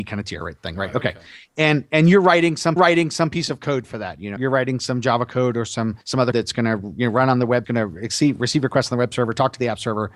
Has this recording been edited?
yes; 5 cuts; at 2.8 s, 4.4 s, 6.0 s, 6.3 s, 7.6 s

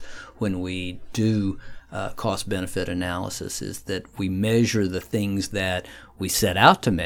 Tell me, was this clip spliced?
no; 0 cuts

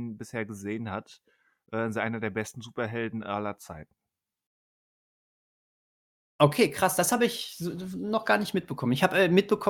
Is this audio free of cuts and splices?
yes; 0 cuts

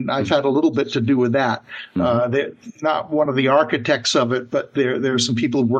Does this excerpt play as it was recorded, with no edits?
yes; 0 cuts

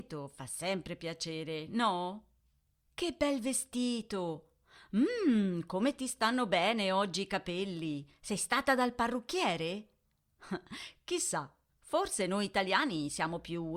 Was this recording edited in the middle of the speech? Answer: no; 0 cuts

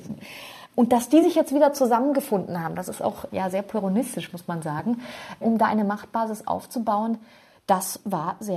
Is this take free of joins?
yes; 0 cuts

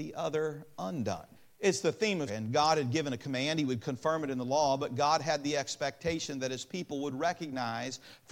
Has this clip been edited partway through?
yes; 2 cuts; at 1.3 s, 2.3 s

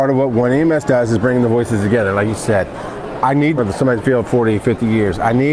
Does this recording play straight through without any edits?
no; 2 cuts; at 3.6 s, 4.0 s

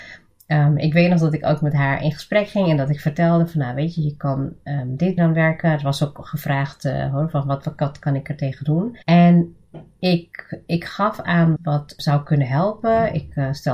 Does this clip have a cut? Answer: yes; 4 cuts; at 5.2 s, 9.0 s, 11.6 s, 12.0 s

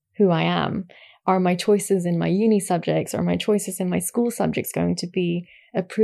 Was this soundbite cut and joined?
no; 0 cuts

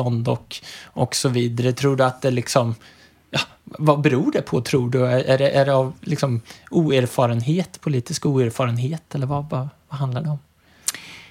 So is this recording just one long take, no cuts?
yes; 0 cuts

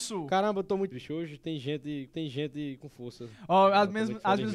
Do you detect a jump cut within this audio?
yes; 2 cuts; at 0.9 s, 2.1 s

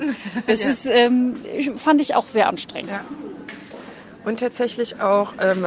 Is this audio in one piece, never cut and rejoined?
yes; 0 cuts

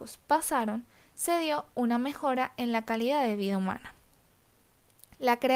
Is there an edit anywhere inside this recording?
no; 0 cuts

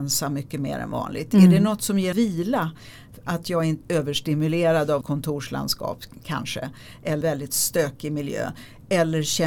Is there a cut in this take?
yes; 4 cuts; at 2.1 s, 3.8 s, 5.0 s, 7.2 s

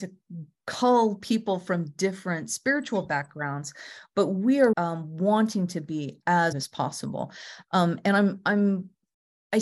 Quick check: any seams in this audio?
yes; 2 cuts; at 4.7 s, 6.5 s

